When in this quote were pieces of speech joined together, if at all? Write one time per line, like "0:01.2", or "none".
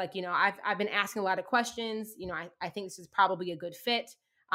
none